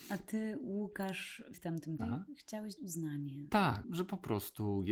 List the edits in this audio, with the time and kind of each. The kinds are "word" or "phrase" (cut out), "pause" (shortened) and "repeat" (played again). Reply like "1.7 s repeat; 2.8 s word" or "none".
1.5 s word; 2.0 s word; 2.8 s word; 3.8 s word